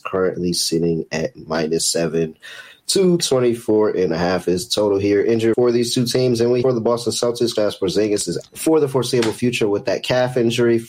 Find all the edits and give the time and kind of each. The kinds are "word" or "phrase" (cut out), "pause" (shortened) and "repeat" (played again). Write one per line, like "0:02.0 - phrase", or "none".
0:05.5 - word
0:06.6 - word
0:07.6 - word
0:08.5 - word